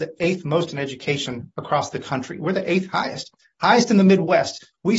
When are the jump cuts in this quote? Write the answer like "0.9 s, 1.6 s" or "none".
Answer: none